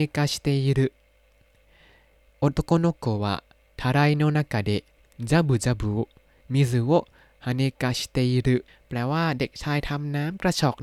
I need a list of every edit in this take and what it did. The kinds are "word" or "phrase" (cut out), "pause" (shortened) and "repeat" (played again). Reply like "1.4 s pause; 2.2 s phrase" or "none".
8.7 s pause